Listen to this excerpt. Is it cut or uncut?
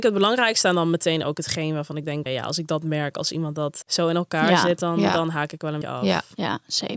cut